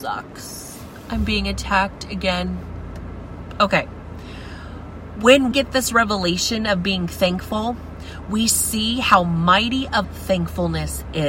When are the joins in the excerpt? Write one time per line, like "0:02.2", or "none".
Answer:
0:05.5
0:10.0